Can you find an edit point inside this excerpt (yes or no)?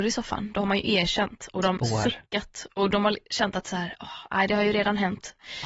yes